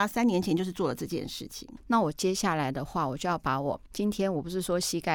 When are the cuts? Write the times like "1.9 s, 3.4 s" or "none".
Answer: 3.9 s